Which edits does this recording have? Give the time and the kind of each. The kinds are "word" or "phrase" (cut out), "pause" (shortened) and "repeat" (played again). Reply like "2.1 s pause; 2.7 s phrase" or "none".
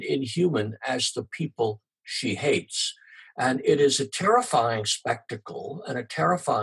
none